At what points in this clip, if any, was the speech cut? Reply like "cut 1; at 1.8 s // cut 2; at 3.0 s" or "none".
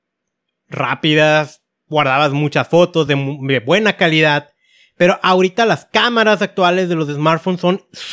none